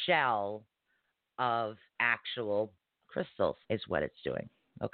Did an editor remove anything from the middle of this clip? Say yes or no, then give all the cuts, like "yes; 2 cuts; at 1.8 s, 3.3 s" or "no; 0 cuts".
yes; 2 cuts; at 1.9 s, 3.6 s